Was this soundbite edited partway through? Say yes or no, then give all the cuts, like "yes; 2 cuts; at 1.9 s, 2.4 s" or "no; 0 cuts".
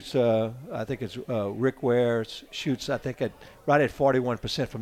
no; 0 cuts